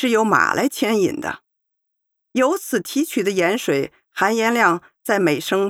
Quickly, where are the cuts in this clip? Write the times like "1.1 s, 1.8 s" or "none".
none